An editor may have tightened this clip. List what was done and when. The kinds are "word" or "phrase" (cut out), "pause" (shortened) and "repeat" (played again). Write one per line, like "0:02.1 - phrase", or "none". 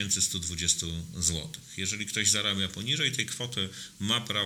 none